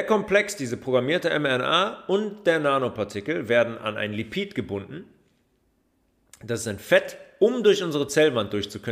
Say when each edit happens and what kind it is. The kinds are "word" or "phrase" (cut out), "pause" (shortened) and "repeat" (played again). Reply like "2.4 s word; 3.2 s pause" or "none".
none